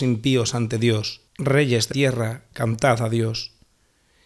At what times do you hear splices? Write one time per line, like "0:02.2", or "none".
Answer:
0:01.3
0:01.9

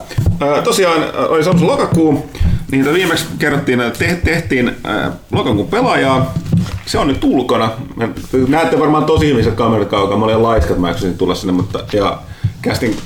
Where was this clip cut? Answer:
none

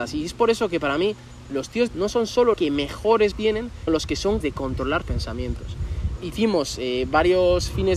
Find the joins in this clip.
0:01.5
0:01.9
0:02.5
0:03.3
0:03.9
0:04.4
0:05.0
0:06.2

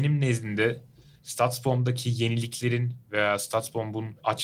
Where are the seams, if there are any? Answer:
0:03.0

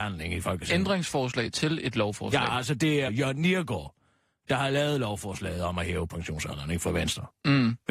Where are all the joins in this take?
0:03.1

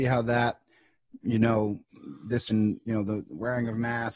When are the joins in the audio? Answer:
0:02.5
0:02.9

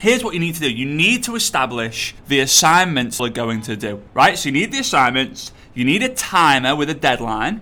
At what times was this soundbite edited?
0:02.2
0:03.2
0:04.1

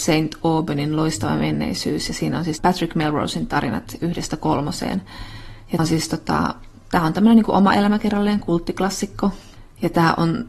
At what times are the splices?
0:02.6
0:05.8

